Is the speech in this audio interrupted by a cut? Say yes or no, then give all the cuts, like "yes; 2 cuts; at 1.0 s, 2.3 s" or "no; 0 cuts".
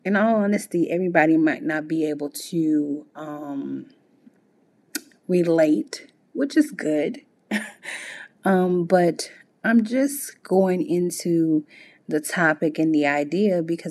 no; 0 cuts